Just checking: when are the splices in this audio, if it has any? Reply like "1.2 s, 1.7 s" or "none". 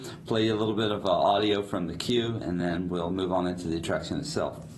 none